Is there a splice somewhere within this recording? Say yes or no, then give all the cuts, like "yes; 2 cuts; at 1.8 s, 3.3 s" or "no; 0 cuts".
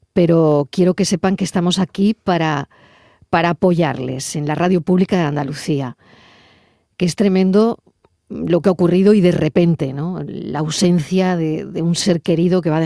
no; 0 cuts